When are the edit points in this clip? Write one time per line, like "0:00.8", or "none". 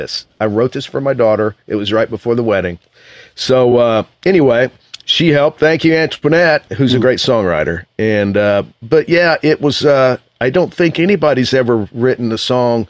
none